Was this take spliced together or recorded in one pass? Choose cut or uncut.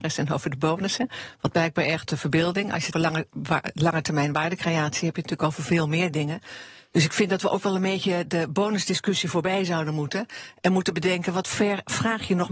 cut